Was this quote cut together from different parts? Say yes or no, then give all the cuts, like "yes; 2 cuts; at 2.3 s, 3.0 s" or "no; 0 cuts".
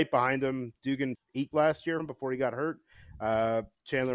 yes; 3 cuts; at 1.1 s, 1.5 s, 2.0 s